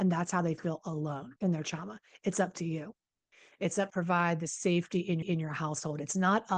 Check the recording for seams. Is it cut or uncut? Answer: cut